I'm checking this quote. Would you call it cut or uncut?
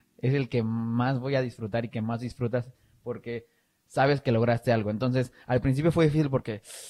uncut